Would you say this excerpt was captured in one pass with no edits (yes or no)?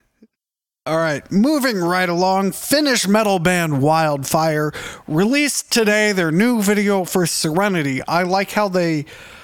yes